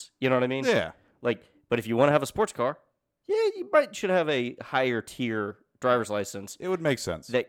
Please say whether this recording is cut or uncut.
uncut